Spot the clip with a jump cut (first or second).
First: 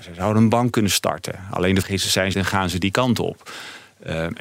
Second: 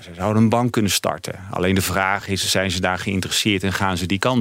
first